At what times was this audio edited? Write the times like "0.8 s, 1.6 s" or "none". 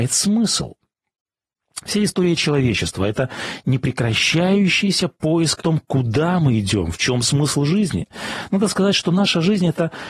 5.6 s